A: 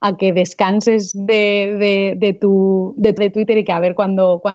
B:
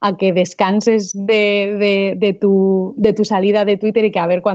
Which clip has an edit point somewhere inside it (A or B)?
A